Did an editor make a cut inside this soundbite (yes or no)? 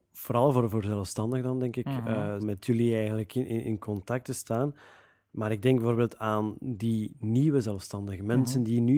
yes